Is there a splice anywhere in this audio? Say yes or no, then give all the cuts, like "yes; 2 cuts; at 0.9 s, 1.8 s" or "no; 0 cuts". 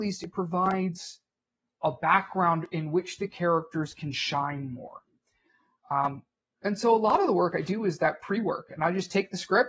no; 0 cuts